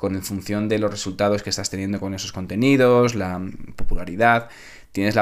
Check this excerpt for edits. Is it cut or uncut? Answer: uncut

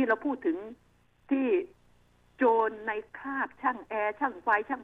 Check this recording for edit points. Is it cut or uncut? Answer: uncut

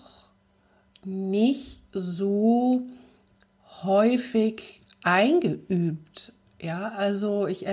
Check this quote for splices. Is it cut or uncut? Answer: uncut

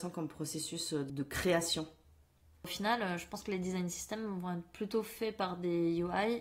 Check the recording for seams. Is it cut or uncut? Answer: uncut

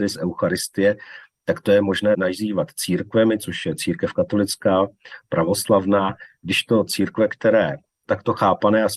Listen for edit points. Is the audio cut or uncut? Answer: cut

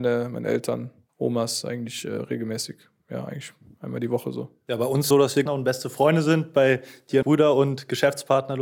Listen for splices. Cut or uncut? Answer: cut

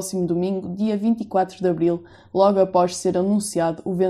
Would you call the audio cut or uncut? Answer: uncut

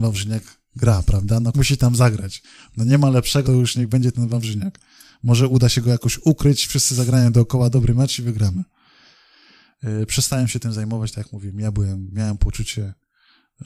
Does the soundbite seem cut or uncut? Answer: cut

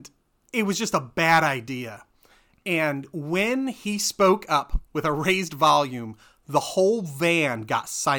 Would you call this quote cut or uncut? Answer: uncut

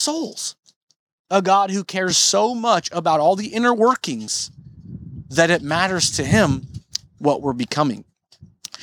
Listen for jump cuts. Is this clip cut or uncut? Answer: uncut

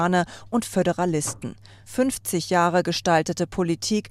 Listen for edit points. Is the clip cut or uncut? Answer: uncut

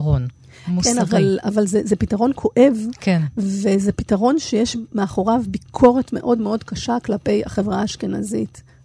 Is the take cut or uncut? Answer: uncut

